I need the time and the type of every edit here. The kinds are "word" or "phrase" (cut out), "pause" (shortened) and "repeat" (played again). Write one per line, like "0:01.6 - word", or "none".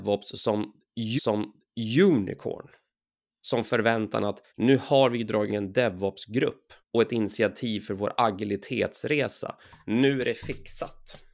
0:01.2 - repeat
0:04.5 - pause
0:05.5 - word
0:06.8 - pause